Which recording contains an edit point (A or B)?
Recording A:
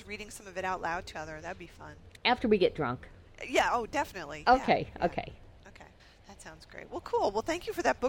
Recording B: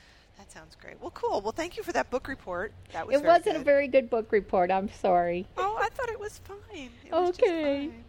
A